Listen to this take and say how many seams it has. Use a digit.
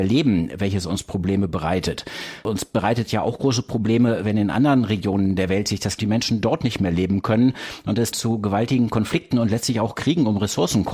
2